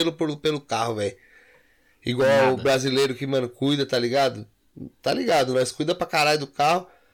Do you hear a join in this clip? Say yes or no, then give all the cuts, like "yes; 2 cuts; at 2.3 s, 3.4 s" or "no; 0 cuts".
no; 0 cuts